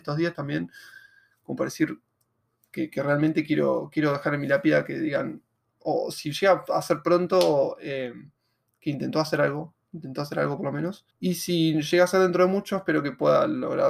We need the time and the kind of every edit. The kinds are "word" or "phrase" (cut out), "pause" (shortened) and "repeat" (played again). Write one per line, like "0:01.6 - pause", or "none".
0:11.1 - pause